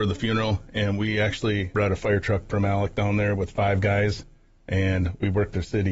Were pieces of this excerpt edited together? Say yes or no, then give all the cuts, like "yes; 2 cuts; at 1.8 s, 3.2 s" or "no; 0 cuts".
no; 0 cuts